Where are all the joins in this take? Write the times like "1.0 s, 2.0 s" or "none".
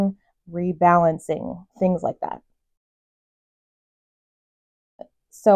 1.7 s